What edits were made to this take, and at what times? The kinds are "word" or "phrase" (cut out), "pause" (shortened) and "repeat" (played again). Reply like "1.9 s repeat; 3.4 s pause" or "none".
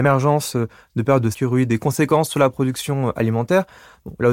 1.3 s word